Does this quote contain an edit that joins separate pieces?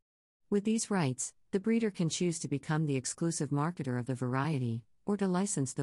no; 0 cuts

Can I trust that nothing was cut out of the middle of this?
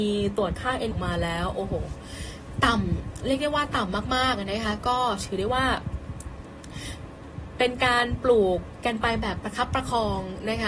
no; 1 cut; at 0.9 s

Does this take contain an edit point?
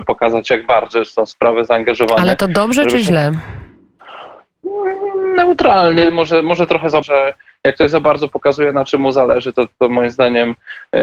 yes; 1 cut; at 7.0 s

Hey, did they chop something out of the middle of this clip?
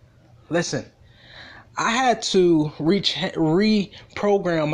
yes; 1 cut; at 1.7 s

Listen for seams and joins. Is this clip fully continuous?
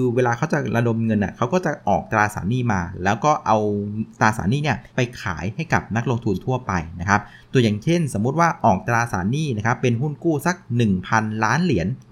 no; 1 cut; at 4.9 s

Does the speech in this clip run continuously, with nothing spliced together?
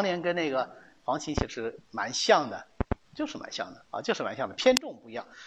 no; 1 cut; at 3.0 s

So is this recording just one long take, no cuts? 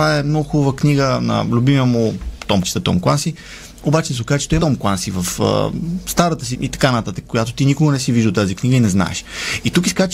no; 3 cuts; at 2.6 s, 4.6 s, 6.5 s

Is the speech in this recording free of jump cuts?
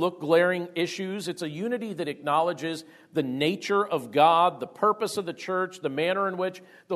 yes; 0 cuts

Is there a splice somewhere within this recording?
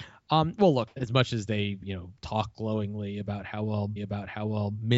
yes; 1 cut; at 4.0 s

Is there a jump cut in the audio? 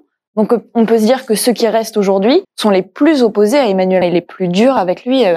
yes; 2 cuts; at 2.4 s, 4.0 s

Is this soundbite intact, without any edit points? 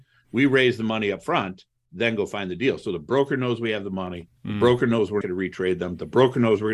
no; 2 cuts; at 4.4 s, 5.2 s

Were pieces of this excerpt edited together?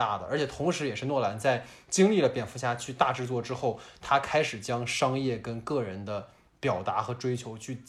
no; 0 cuts

